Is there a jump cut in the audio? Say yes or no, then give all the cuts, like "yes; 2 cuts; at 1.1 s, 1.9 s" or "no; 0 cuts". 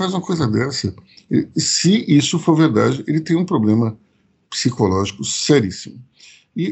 no; 0 cuts